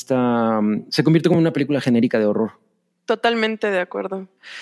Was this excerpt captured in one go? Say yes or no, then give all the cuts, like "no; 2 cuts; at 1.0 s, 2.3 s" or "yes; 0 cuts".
yes; 0 cuts